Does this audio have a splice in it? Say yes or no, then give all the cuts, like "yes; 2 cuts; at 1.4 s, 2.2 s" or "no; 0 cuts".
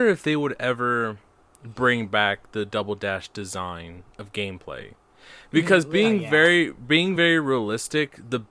no; 0 cuts